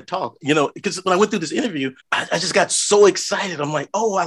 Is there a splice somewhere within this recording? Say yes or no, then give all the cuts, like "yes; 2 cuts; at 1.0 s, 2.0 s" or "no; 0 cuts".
yes; 1 cut; at 2.0 s